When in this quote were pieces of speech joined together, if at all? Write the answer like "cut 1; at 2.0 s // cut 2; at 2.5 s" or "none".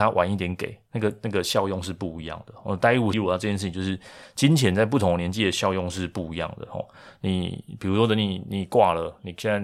cut 1; at 3.1 s